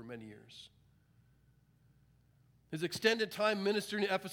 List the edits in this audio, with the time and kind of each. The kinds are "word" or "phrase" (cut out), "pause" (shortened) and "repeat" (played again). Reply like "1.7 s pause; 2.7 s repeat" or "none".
none